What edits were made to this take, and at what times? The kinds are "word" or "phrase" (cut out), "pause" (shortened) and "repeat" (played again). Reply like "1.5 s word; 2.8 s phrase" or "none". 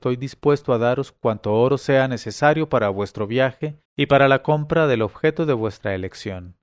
3.9 s pause

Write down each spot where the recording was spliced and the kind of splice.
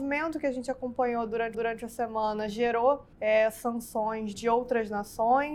1.5 s repeat; 3.1 s pause; 4.3 s word

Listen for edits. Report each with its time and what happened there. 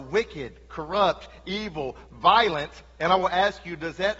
none

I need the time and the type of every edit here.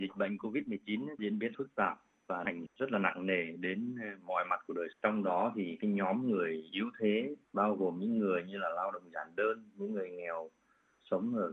1.2 s phrase; 1.5 s word; 2.7 s word; 4.9 s phrase; 7.4 s pause

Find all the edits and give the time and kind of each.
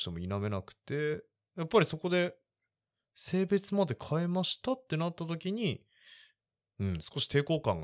none

